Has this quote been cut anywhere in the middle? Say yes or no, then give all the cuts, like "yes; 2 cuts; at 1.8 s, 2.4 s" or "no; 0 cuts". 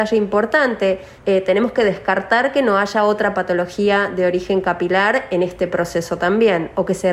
no; 0 cuts